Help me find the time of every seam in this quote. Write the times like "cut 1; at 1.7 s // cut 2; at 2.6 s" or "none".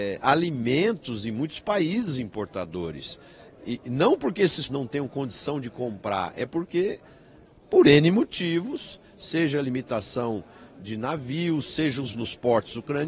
cut 1; at 4.7 s // cut 2; at 12.1 s